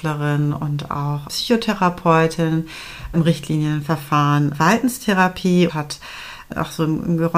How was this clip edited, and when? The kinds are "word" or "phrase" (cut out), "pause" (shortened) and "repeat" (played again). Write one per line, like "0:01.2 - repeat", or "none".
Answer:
0:01.3 - word
0:03.1 - word
0:04.5 - word
0:05.7 - word